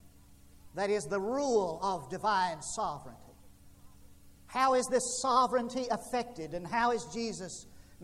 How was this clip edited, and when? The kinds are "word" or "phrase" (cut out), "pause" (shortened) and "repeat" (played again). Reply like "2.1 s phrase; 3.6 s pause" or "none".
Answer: 4.4 s pause